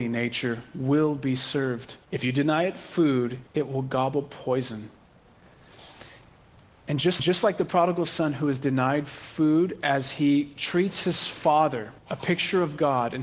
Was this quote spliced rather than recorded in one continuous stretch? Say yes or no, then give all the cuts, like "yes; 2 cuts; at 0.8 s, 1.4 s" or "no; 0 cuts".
yes; 4 cuts; at 2.0 s, 3.5 s, 7.2 s, 12.0 s